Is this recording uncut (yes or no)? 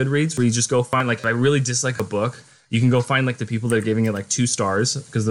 yes